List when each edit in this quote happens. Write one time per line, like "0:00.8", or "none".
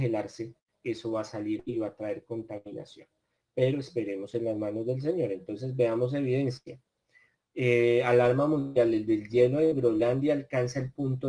none